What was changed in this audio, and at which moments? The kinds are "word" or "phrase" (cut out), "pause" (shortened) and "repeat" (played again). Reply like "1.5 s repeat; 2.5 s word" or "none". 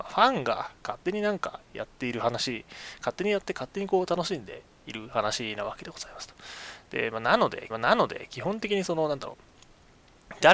7.7 s repeat